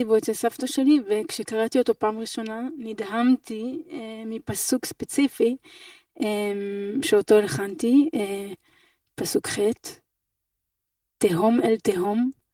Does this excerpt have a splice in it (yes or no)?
no